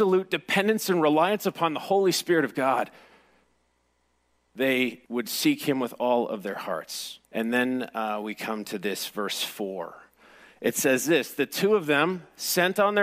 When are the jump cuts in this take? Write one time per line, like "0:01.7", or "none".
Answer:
0:05.0
0:07.2